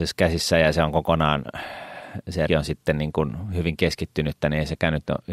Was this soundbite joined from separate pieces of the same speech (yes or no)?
yes